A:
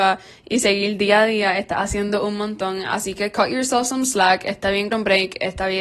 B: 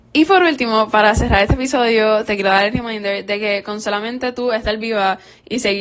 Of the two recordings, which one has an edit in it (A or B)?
A